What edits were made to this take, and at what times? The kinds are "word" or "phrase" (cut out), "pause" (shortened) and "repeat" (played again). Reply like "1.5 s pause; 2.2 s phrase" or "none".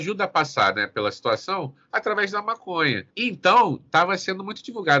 3.1 s pause